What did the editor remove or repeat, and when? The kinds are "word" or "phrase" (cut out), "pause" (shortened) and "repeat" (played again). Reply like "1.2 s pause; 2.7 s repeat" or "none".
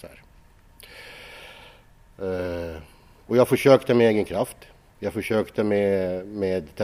none

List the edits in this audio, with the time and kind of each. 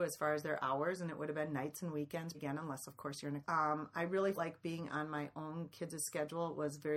2.3 s word; 3.4 s phrase; 4.3 s word

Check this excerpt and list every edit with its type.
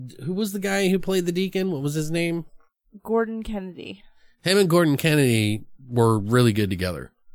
none

